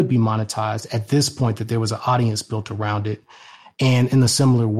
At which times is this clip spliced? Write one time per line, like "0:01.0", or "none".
none